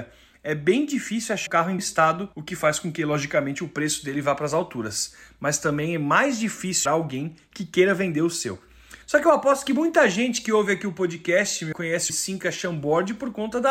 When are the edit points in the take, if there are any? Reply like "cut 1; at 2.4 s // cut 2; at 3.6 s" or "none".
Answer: cut 1; at 1.5 s // cut 2; at 1.8 s // cut 3; at 2.3 s // cut 4; at 6.9 s // cut 5; at 9.0 s // cut 6; at 11.7 s // cut 7; at 12.1 s